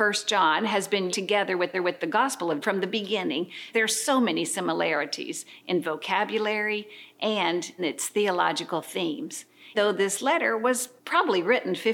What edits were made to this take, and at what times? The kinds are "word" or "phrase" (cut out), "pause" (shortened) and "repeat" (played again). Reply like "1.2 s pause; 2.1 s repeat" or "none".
1.1 s word; 1.7 s repeat; 2.6 s word; 3.7 s word; 7.8 s word; 9.7 s word; 11.0 s pause

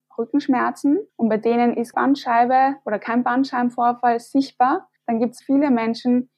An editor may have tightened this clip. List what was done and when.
1.1 s pause; 1.9 s word; 5.0 s pause; 5.4 s word

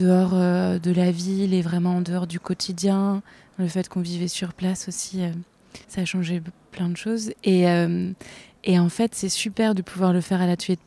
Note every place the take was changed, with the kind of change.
5.8 s pause

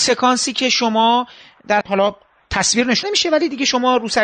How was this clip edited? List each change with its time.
1.8 s word; 3.0 s word

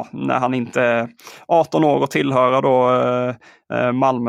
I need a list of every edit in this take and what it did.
none

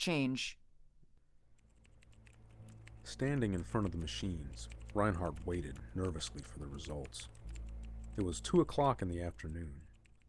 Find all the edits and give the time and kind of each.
none

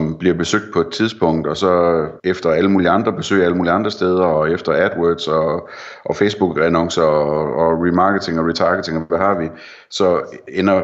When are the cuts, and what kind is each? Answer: 2.2 s pause

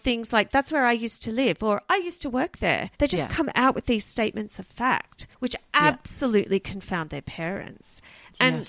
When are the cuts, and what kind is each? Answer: 2.9 s pause; 5.3 s pause

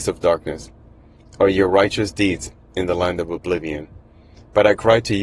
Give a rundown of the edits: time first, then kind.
none

